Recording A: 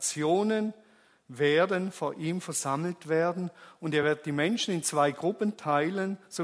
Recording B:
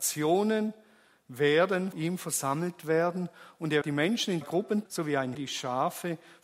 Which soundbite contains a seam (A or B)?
B